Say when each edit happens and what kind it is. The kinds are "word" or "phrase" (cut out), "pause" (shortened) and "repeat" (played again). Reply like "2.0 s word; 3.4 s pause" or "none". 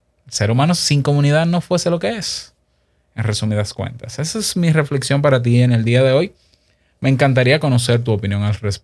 none